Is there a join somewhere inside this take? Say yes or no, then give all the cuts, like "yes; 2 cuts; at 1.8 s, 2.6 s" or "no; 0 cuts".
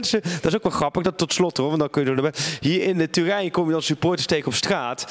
no; 0 cuts